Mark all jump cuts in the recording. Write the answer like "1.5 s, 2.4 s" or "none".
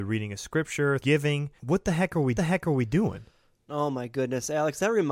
1.0 s, 1.6 s, 2.4 s